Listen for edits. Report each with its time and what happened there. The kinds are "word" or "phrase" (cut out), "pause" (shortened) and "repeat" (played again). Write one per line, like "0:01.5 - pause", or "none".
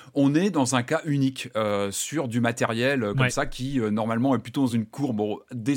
none